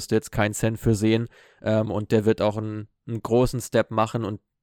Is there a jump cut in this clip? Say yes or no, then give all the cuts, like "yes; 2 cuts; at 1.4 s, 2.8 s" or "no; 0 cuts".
no; 0 cuts